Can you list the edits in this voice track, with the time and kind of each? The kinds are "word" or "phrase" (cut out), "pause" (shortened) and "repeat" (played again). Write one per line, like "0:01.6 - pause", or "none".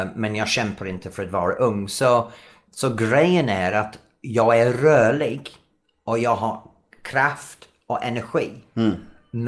none